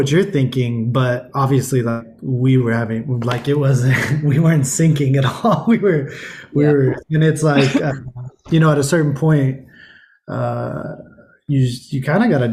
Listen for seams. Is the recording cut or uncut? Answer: uncut